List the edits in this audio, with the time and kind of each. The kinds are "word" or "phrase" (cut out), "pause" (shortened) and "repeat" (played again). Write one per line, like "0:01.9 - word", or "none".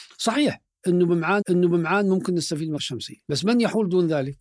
0:01.4 - repeat
0:02.8 - word
0:03.2 - pause